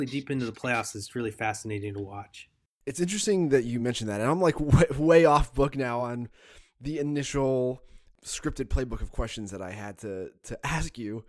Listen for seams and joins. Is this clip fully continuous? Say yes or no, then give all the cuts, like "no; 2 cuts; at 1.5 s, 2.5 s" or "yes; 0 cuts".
yes; 0 cuts